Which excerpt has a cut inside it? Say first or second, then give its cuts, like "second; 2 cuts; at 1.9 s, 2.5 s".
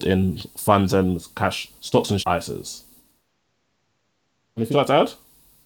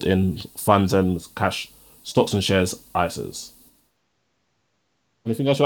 first; 3 cuts; at 1.8 s, 2.2 s, 4.7 s